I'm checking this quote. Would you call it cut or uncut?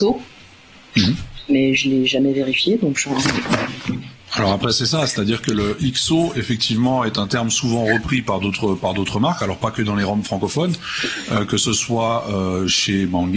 uncut